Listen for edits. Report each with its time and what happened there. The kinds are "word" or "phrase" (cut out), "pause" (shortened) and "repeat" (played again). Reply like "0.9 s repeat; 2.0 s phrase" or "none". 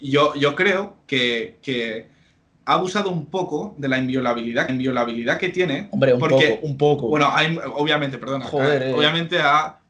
4.7 s repeat